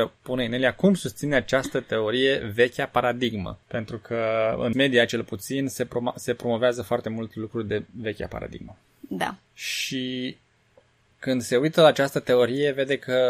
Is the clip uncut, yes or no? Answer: no